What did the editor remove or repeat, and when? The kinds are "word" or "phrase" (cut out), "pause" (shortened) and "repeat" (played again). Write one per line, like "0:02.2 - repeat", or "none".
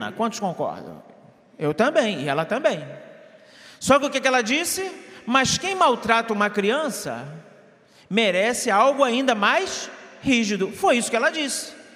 none